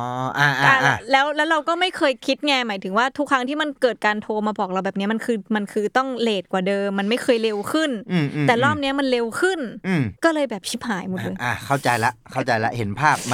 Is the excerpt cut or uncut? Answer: cut